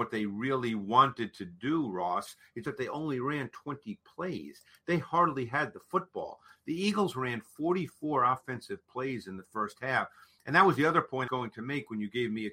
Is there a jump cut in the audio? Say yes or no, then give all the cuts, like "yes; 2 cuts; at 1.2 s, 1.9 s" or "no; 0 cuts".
yes; 2 cuts; at 2.6 s, 11.3 s